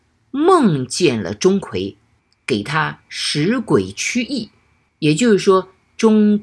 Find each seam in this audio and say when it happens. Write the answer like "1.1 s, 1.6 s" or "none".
none